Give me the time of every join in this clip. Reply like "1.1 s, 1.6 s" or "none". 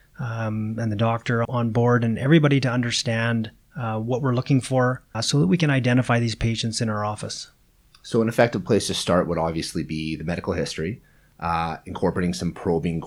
1.4 s, 5.1 s